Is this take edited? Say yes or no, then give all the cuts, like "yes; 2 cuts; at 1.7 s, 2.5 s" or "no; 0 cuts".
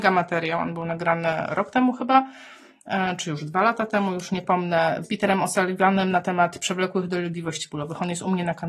yes; 1 cut; at 5.0 s